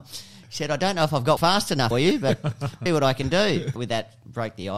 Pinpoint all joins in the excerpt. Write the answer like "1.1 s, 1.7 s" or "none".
1.4 s, 1.9 s, 2.9 s, 3.8 s